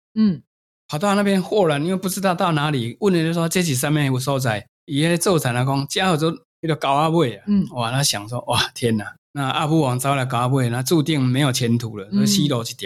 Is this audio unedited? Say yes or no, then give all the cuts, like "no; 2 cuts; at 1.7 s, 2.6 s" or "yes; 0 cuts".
no; 1 cut; at 9.2 s